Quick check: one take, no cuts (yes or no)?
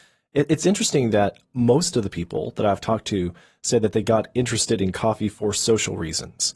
yes